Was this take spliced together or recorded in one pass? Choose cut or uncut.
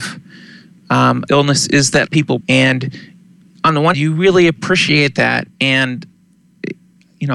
cut